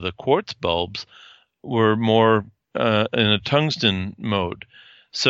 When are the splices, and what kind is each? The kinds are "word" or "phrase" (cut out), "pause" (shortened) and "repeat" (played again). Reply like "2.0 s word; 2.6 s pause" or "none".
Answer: none